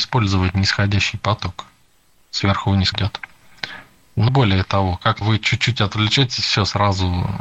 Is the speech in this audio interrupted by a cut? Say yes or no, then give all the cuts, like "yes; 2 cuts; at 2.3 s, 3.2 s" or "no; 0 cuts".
yes; 3 cuts; at 2.9 s, 4.3 s, 5.2 s